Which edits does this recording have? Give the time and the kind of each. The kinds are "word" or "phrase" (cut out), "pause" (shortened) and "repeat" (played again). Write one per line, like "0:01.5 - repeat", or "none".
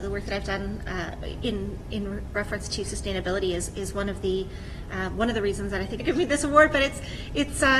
0:06.0 - phrase